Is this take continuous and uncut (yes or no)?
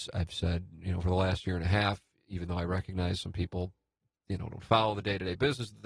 yes